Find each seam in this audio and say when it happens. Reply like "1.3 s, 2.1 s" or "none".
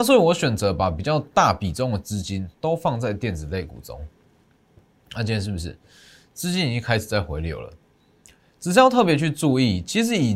none